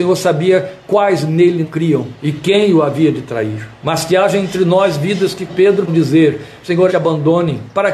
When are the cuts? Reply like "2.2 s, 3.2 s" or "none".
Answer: 1.6 s, 2.2 s, 3.8 s, 5.5 s, 5.9 s, 6.9 s